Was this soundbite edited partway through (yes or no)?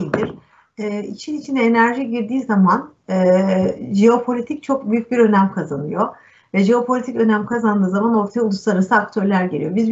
no